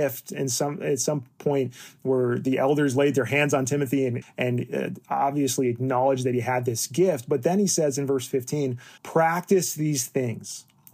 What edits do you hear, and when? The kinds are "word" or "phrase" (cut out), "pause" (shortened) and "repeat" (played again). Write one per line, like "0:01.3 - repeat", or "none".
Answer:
0:04.2 - word
0:09.0 - pause